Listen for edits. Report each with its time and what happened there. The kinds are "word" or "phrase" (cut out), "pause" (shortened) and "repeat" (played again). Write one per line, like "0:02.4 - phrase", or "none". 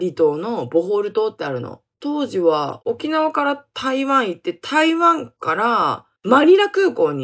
0:01.9 - pause
0:06.2 - pause